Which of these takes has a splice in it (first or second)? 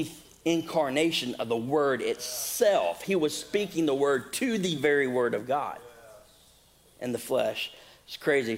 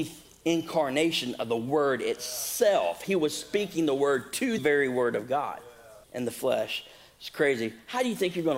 second